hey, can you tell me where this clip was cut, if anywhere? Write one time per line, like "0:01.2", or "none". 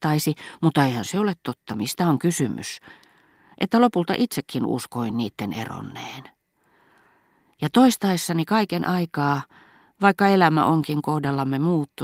none